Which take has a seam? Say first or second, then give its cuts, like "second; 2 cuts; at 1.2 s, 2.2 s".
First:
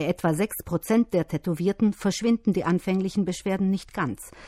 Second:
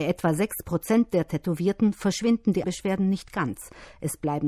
second; 1 cut; at 2.6 s